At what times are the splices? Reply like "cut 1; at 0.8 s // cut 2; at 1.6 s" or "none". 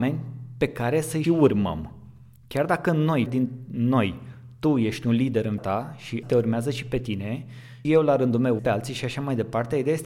cut 1; at 1.2 s // cut 2; at 3.3 s // cut 3; at 5.6 s // cut 4; at 6.2 s // cut 5; at 7.8 s // cut 6; at 8.6 s